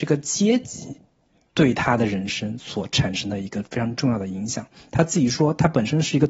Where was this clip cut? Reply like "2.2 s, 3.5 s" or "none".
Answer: none